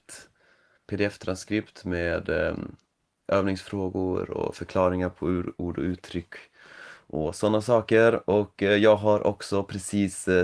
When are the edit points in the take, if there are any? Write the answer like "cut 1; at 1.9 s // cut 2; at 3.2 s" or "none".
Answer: none